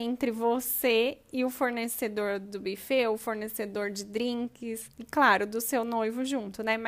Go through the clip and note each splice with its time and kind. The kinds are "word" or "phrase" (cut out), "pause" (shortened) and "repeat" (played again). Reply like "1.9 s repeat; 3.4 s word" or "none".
4.9 s pause

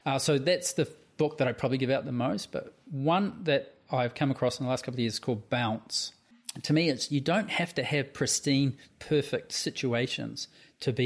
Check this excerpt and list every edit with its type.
none

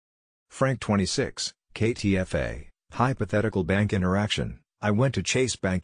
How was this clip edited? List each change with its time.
none

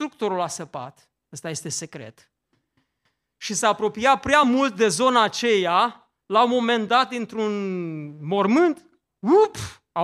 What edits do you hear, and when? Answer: none

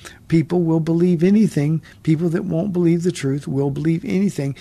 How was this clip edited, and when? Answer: none

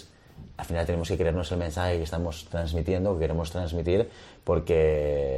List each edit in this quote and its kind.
none

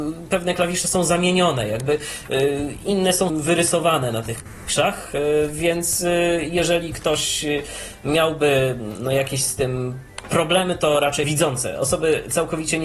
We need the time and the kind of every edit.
3.3 s word; 11.2 s word

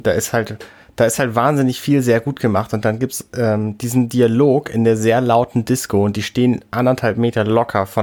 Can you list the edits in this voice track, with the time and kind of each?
none

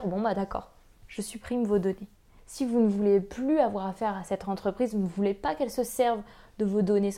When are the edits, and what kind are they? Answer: none

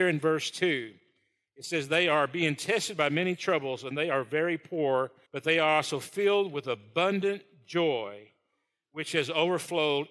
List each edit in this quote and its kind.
5.3 s pause

